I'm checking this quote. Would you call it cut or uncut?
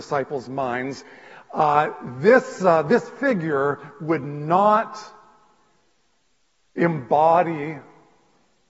uncut